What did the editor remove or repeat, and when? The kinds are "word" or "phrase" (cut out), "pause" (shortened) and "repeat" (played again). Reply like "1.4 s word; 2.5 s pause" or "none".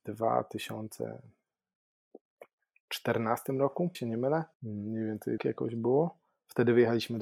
3.9 s word; 4.5 s pause; 5.4 s word